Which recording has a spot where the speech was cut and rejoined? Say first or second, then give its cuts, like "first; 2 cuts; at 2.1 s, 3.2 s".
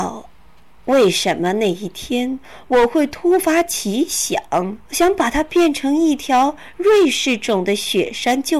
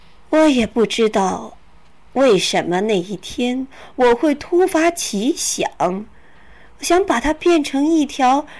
first; 1 cut; at 4.8 s